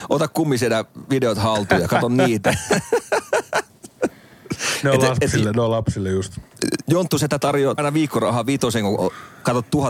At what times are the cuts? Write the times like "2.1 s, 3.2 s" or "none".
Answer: 7.8 s